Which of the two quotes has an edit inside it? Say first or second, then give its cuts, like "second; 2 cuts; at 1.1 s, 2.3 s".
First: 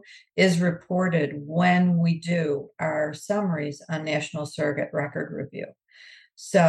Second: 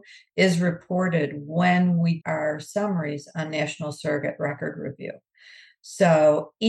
second; 1 cut; at 2.2 s